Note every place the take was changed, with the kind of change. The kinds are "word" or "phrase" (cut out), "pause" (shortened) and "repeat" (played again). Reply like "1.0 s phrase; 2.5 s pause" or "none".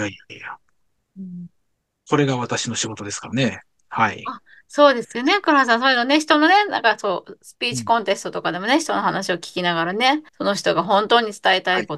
10.3 s pause